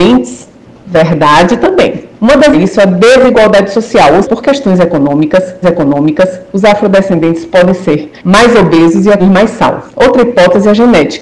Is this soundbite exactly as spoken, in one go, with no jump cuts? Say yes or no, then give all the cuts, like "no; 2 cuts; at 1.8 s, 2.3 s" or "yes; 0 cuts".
no; 7 cuts; at 2.1 s, 2.5 s, 4.2 s, 5.6 s, 8.2 s, 9.2 s, 9.9 s